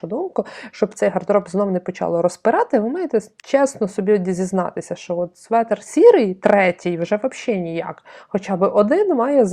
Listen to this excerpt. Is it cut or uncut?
uncut